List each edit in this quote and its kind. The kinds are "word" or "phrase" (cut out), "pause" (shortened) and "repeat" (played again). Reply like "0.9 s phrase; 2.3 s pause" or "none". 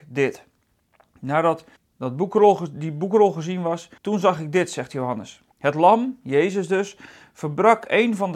1.8 s pause; 4.0 s pause; 5.5 s pause